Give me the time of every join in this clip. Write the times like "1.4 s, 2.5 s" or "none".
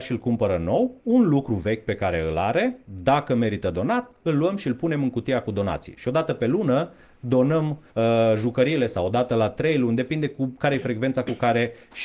1.0 s, 2.8 s, 7.9 s